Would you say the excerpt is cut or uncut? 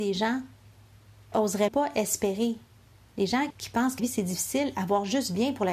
cut